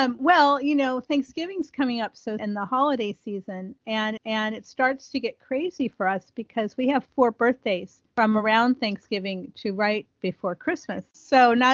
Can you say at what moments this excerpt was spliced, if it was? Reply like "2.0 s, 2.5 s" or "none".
2.4 s, 4.2 s, 8.1 s, 10.1 s